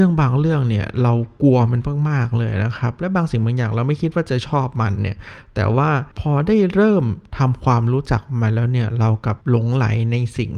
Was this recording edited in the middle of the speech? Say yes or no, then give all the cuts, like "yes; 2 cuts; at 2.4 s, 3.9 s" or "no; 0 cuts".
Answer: yes; 2 cuts; at 6.1 s, 9.4 s